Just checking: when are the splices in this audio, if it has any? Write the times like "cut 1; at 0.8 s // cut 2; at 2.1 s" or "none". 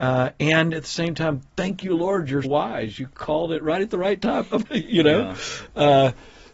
cut 1; at 2.4 s // cut 2; at 4.6 s